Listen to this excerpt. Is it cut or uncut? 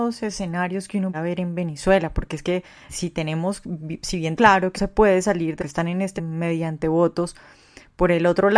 cut